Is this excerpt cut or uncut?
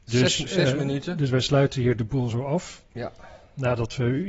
cut